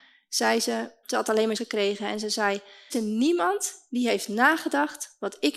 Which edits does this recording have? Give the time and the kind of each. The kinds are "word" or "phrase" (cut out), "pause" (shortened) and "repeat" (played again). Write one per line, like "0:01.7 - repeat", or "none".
0:01.0 - word
0:01.5 - word
0:02.9 - phrase